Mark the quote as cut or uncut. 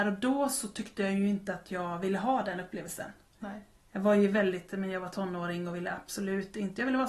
uncut